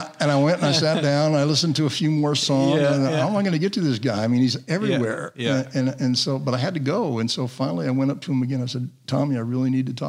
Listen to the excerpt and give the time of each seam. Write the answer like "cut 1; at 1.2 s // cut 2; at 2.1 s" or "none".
none